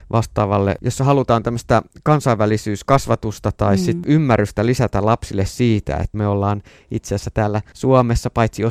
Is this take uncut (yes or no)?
yes